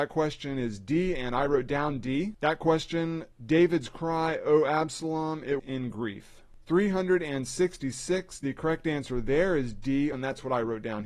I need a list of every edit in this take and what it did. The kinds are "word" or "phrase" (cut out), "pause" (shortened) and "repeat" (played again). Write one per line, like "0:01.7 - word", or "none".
0:03.3 - pause
0:05.6 - word
0:10.1 - word